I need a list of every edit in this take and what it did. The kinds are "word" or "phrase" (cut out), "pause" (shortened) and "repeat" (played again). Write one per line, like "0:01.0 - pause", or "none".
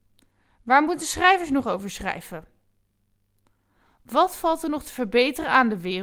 none

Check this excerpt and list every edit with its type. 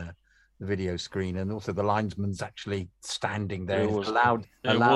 none

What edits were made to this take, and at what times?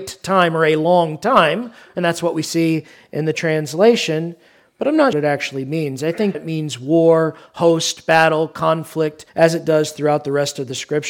0:05.1 - phrase
0:06.3 - word
0:09.3 - pause

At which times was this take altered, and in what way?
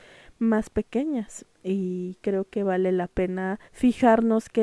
0:03.7 - pause

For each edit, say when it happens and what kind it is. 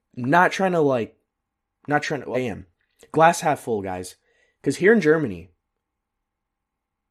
0:02.3 - word

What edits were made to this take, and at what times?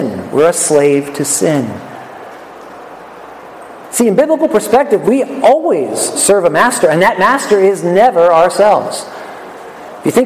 none

